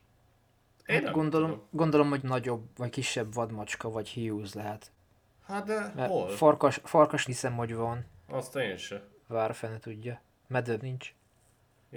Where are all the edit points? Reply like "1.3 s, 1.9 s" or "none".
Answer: 2.2 s, 5.1 s, 7.3 s, 10.8 s